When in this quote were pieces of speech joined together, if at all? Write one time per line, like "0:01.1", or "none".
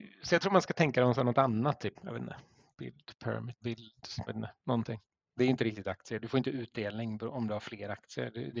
0:02.0
0:03.6
0:04.3